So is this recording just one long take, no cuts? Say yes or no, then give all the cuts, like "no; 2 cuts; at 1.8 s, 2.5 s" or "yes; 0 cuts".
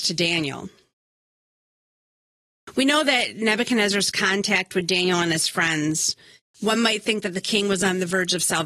yes; 0 cuts